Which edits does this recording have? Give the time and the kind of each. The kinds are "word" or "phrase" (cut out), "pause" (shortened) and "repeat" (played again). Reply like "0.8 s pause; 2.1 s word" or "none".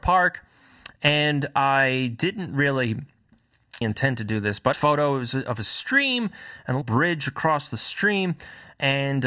3.8 s phrase; 4.7 s phrase; 6.8 s word